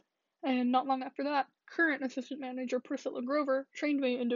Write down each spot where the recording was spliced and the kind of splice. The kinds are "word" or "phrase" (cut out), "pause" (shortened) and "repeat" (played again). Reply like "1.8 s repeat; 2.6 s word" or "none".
1.6 s pause